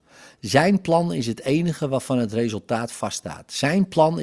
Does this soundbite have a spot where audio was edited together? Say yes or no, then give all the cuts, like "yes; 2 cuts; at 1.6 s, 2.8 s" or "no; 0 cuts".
no; 0 cuts